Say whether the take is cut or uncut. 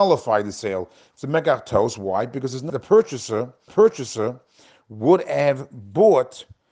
cut